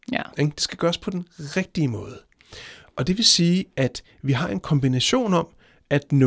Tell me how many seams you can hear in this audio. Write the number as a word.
zero